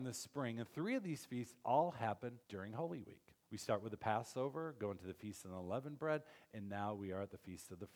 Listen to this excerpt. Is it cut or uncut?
cut